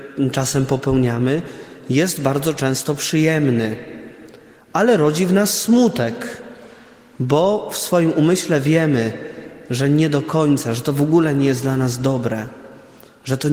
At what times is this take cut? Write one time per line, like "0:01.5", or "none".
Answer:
none